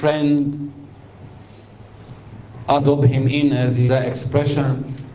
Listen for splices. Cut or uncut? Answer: cut